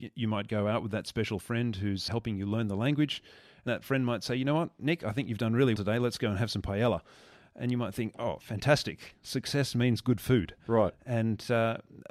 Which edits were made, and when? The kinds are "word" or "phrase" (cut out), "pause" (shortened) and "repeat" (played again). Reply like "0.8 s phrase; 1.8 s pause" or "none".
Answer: 2.1 s word; 3.7 s word; 5.8 s word